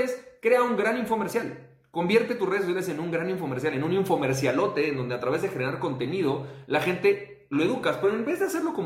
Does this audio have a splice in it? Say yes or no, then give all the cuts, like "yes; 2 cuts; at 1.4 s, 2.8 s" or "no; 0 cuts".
no; 0 cuts